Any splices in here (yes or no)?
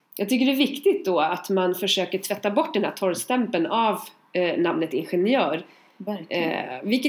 no